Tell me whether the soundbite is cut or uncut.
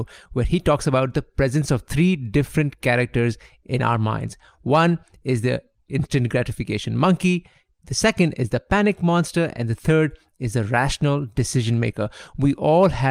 uncut